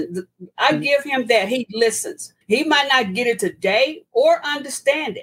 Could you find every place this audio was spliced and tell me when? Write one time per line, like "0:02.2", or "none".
0:02.4